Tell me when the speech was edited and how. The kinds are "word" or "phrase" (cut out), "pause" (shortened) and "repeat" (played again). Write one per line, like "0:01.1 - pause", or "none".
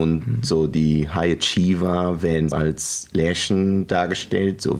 0:02.5 - word